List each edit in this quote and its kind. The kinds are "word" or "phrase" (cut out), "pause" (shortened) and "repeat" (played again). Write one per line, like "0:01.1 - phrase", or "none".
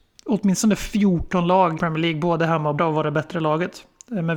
0:01.8 - word
0:02.8 - word